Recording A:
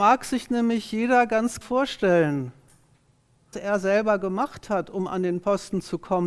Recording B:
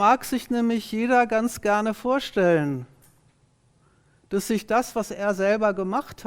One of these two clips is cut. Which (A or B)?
A